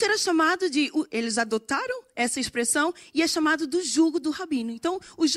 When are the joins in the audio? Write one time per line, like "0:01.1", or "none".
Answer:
none